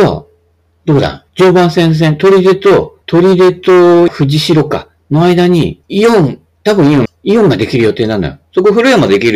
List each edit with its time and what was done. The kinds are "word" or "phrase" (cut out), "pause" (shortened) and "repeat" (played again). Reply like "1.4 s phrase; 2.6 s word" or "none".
1.3 s pause; 3.0 s pause; 4.1 s word; 5.8 s pause; 7.1 s phrase